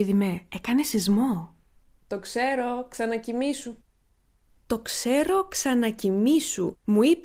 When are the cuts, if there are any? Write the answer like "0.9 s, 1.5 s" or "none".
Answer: none